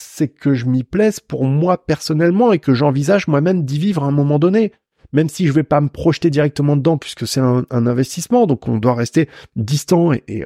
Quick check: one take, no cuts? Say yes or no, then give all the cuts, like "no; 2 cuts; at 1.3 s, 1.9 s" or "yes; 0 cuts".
yes; 0 cuts